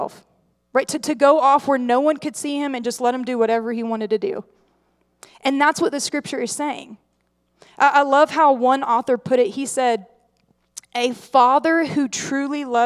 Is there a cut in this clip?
no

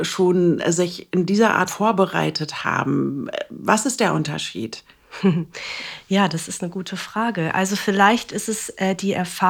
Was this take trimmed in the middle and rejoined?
yes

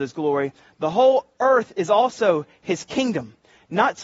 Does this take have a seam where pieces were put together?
no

